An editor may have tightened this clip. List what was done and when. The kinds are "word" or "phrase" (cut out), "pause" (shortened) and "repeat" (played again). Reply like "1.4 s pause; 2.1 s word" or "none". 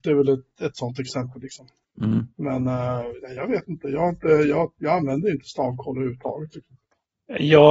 2.3 s pause